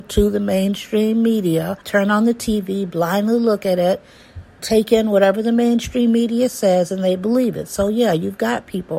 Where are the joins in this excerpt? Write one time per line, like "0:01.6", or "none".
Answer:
0:01.8
0:04.6

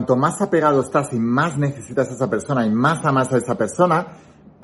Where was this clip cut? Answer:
none

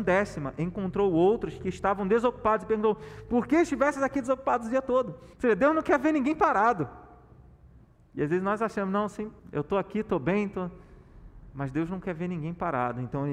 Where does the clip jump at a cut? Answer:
0:05.3
0:07.8
0:09.4

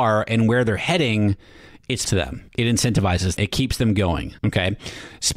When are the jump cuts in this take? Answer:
0:02.0
0:02.5
0:03.4
0:04.4

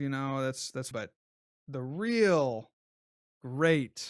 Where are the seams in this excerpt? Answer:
0:00.9
0:03.0

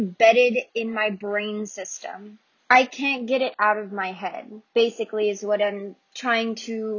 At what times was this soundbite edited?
0:02.6

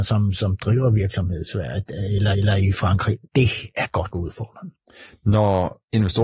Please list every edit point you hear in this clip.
0:02.3
0:03.2
0:04.1

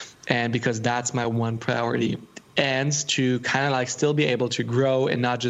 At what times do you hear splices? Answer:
none

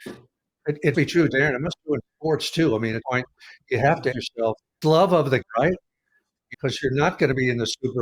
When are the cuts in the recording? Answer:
0:00.9
0:01.8
0:03.0
0:04.1
0:04.8
0:05.4
0:06.5

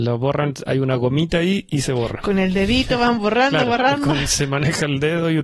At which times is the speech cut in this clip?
none

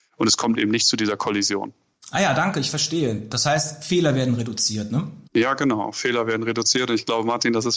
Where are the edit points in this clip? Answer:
0:05.3

